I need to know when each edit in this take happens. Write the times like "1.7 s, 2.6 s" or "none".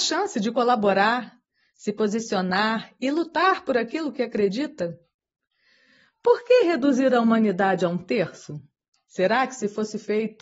none